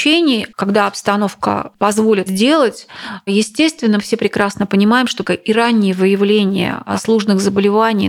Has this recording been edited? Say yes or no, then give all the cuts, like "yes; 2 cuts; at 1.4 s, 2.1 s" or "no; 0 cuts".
yes; 3 cuts; at 2.3 s, 4.0 s, 5.2 s